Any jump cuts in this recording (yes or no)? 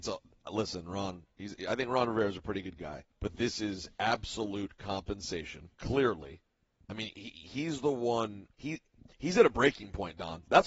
yes